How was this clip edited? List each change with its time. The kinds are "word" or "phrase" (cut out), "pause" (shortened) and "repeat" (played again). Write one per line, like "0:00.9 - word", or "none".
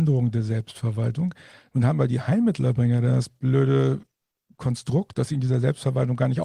none